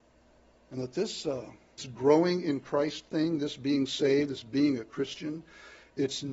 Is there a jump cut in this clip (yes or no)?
yes